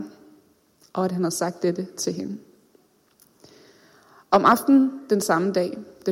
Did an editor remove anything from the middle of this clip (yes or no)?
no